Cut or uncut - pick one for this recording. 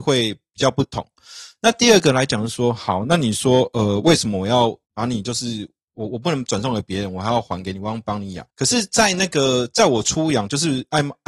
cut